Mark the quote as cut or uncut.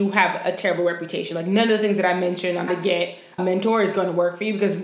cut